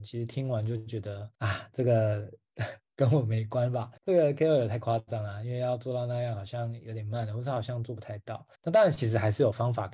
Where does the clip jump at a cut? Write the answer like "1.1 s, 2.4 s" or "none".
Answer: 1.3 s, 4.0 s, 8.6 s